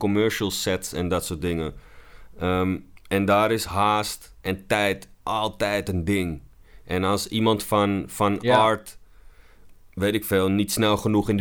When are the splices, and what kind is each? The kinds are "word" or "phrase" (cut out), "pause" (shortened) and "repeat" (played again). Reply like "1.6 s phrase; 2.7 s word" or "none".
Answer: 4.4 s pause